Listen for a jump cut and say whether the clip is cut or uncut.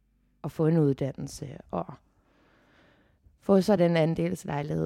uncut